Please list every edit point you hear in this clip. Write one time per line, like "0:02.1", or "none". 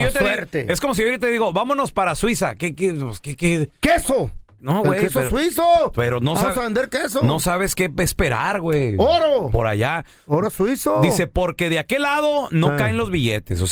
none